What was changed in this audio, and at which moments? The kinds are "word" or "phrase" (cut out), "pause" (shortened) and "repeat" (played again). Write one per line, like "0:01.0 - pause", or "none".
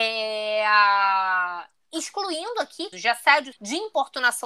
0:02.9 - word
0:03.5 - word